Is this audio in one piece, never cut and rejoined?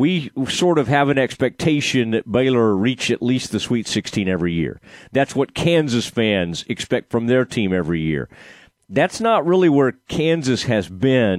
yes; 0 cuts

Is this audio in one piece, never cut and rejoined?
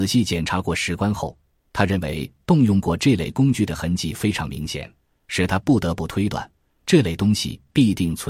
yes; 0 cuts

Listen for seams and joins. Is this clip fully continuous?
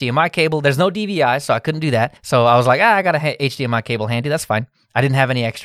no; 1 cut; at 2.2 s

